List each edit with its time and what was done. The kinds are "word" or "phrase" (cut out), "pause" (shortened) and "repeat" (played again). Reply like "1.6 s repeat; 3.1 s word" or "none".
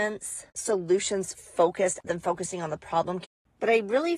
2.0 s word